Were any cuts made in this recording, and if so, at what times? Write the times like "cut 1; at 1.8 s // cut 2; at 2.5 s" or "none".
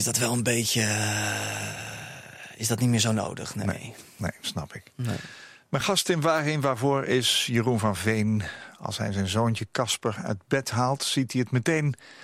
none